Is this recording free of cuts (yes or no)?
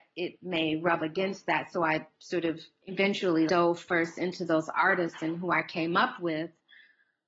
no